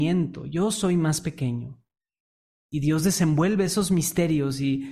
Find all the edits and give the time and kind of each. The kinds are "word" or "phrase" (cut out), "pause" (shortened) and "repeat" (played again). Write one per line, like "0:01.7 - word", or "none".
none